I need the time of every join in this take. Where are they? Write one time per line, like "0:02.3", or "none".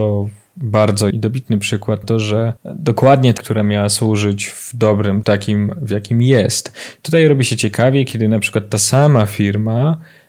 0:01.1
0:02.0
0:02.6
0:03.4
0:05.2